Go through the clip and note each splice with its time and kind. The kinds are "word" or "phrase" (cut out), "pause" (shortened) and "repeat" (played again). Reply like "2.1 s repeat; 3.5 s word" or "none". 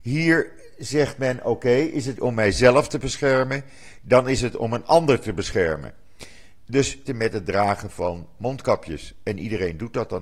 2.2 s word; 7.1 s phrase